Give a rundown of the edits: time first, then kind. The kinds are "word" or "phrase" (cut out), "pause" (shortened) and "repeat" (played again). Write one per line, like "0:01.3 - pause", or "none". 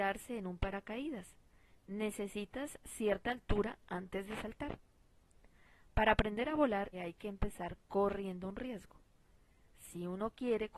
0:06.9 - word